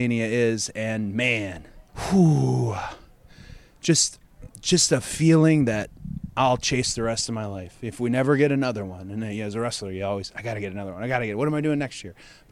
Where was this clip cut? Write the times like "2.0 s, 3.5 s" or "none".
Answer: 1.9 s, 4.5 s